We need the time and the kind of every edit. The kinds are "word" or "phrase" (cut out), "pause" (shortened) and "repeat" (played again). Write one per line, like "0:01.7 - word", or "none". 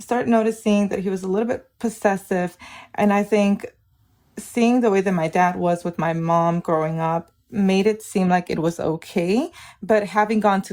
none